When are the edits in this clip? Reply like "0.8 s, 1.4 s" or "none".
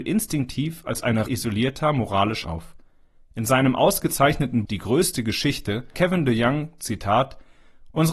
1.3 s, 2.4 s, 4.6 s, 5.9 s

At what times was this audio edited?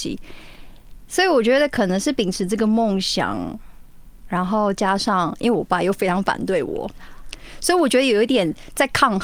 none

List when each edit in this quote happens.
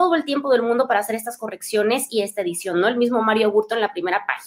none

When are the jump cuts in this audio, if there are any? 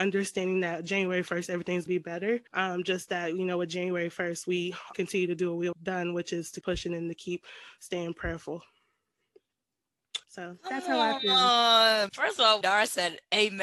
1.9 s, 2.5 s, 4.9 s, 5.7 s, 6.6 s, 10.2 s, 12.1 s, 12.6 s

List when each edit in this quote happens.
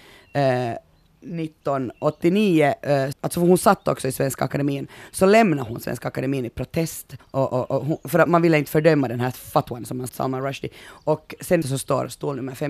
3.1 s, 7.2 s, 8.3 s, 10.1 s, 11.6 s

